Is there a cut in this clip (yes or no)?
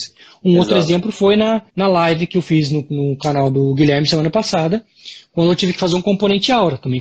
yes